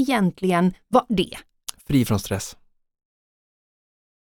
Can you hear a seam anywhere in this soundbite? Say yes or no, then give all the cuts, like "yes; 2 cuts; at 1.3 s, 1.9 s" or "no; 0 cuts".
yes; 1 cut; at 1.1 s